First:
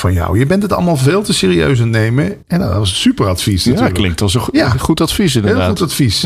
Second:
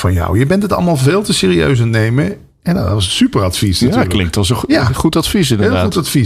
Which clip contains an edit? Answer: first; 1 cut; at 2.4 s

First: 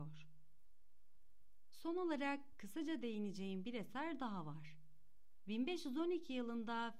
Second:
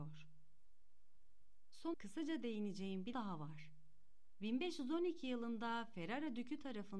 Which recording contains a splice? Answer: second; 2 cuts; at 1.9 s, 3.1 s

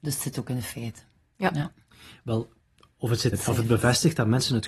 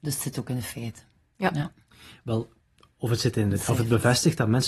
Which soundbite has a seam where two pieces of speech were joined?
first; 1 cut; at 3.3 s

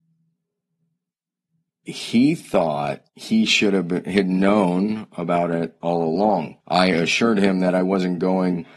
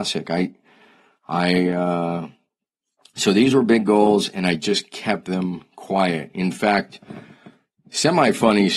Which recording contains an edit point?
first; 2 cuts; at 3.1 s, 6.6 s

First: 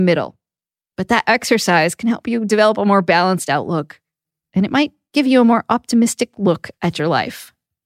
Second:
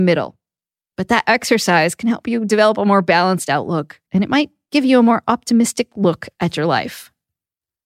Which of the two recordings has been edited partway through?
second; 1 cut; at 4.1 s

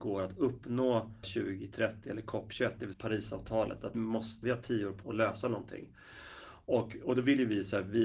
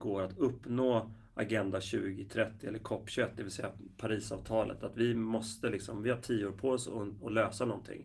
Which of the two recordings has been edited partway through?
first; 5 cuts; at 1.2 s, 2.9 s, 3.9 s, 4.4 s, 5.0 s

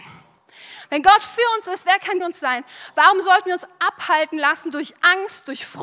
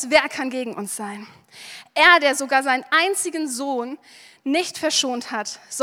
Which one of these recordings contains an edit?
first; 1 cut; at 2.2 s

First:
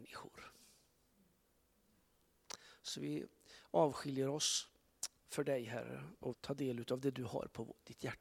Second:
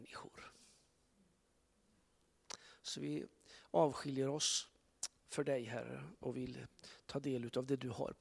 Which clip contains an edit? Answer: first; 1 cut; at 6.3 s

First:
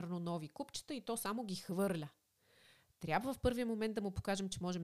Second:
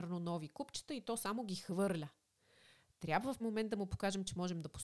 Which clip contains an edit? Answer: second; 1 cut; at 3.4 s

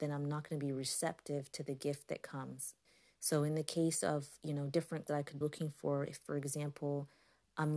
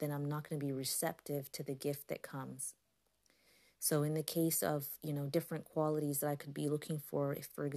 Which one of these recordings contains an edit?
first; 3 cuts; at 2.8 s, 5.1 s, 5.4 s

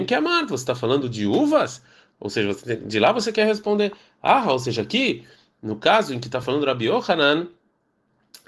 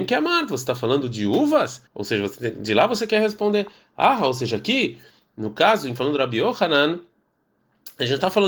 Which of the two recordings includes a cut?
second; 2 cuts; at 1.9 s, 6.0 s

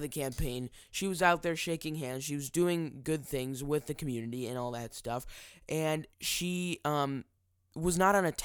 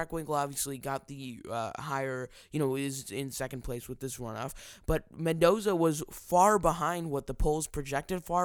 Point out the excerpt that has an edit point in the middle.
first; 2 cuts; at 6.1 s, 7.4 s

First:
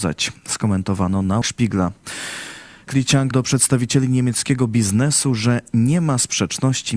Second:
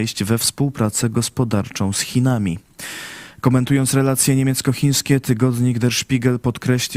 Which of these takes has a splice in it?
first; 3 cuts; at 1.4 s, 2.9 s, 3.3 s

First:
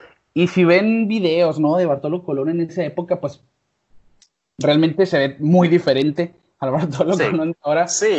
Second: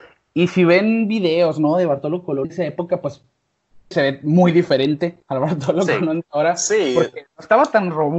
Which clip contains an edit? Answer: second; 3 cuts; at 2.4 s, 3.9 s, 5.2 s

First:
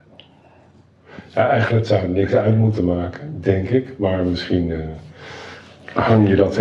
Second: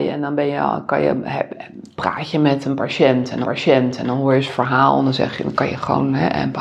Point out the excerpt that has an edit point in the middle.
second; 1 cut; at 3.4 s

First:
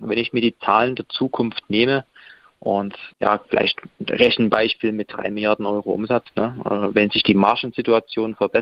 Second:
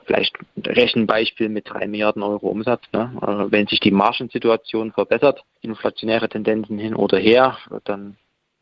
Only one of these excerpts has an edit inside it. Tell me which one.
first; 1 cut; at 3.1 s

